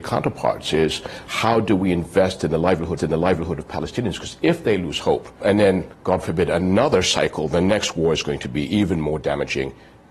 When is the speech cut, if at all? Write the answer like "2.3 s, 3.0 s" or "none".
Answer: 3.0 s, 5.4 s, 5.9 s